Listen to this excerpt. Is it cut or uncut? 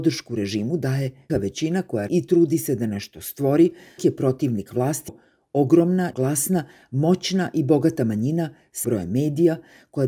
cut